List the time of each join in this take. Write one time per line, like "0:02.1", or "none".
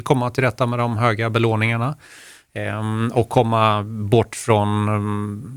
none